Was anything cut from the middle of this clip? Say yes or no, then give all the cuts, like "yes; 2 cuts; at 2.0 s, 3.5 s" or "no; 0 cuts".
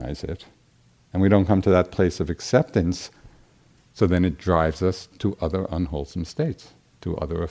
no; 0 cuts